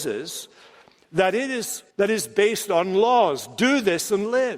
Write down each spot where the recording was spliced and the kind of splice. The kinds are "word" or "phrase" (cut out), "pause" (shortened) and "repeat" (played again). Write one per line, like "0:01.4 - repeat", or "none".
0:01.9 - pause